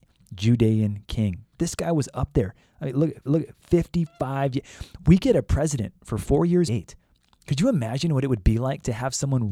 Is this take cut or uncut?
cut